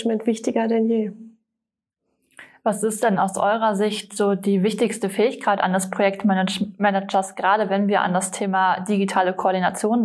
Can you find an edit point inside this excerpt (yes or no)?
no